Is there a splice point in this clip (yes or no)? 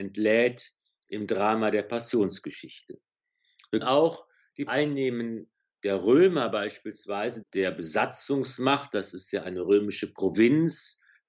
yes